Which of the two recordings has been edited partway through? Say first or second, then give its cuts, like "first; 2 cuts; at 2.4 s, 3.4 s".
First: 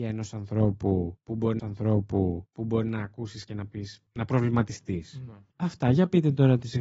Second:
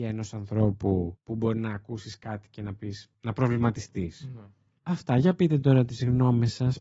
first; 3 cuts; at 1.6 s, 3.5 s, 5.5 s